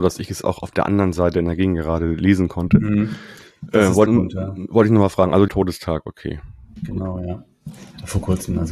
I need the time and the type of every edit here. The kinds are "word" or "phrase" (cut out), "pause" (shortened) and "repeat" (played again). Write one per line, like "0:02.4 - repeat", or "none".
0:04.1 - phrase
0:05.5 - phrase

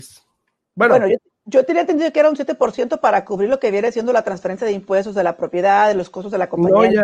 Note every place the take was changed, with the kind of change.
none

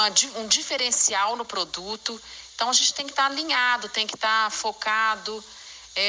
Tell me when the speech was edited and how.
none

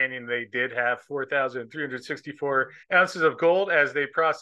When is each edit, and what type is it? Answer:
0:02.8 - pause

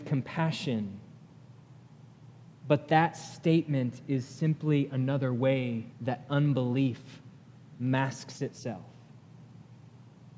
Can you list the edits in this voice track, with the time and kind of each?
0:05.9 - pause

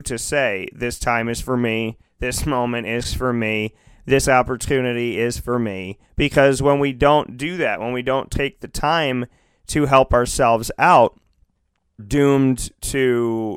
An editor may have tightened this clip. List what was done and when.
0:06.0 - pause
0:12.0 - word

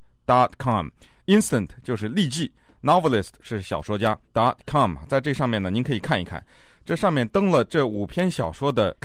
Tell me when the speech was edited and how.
none

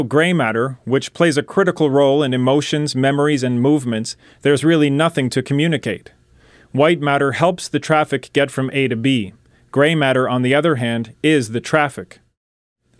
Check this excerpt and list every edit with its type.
none

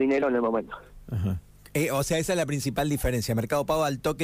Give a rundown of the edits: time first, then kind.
none

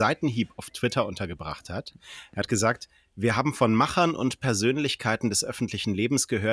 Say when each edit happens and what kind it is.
none

